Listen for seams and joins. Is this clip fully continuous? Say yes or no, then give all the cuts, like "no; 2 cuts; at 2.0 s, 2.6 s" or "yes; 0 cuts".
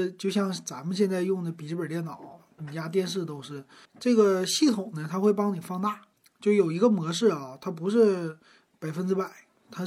no; 2 cuts; at 3.9 s, 6.1 s